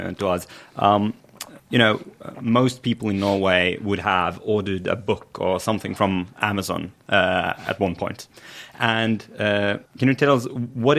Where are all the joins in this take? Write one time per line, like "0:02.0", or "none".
0:01.6
0:09.9